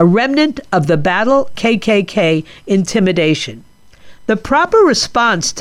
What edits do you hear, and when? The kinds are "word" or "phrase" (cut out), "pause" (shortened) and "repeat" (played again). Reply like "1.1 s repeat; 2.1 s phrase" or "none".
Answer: 1.5 s word